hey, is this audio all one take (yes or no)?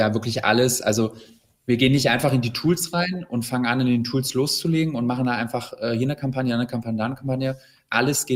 yes